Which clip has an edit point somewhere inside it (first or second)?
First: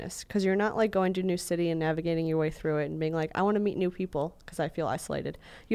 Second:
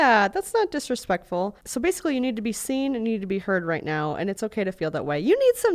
second